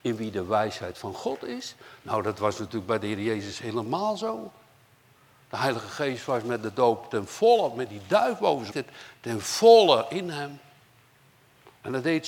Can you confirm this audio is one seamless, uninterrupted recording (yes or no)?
no